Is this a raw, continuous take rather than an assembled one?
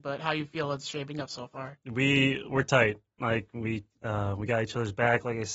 no; 1 cut; at 1.8 s

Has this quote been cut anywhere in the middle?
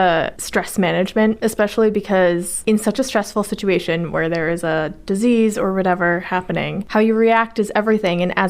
no; 0 cuts

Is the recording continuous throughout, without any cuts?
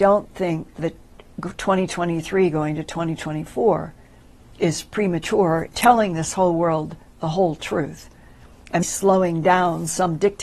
no; 2 cuts; at 5.7 s, 8.8 s

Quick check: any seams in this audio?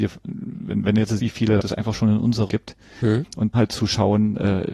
yes; 4 cuts; at 1.2 s, 1.6 s, 2.5 s, 3.5 s

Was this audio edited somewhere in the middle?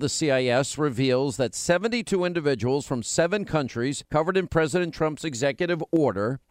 no; 0 cuts

